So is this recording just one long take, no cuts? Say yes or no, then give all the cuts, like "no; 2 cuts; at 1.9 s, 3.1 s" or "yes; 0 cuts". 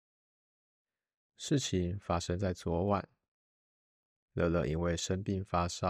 yes; 0 cuts